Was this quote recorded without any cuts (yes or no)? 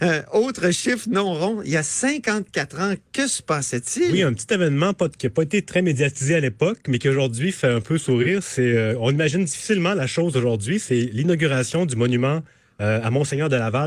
yes